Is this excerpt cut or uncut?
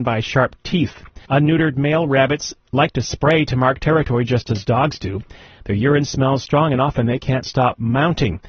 cut